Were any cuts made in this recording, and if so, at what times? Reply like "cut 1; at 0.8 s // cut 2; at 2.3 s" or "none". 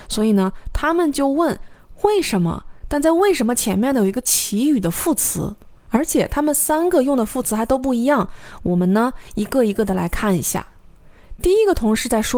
cut 1; at 5.8 s